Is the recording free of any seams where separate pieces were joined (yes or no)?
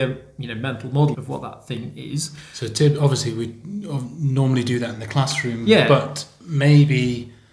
no